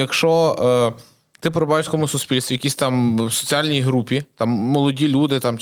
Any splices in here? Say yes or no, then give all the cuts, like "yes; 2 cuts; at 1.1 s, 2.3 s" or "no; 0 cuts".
no; 0 cuts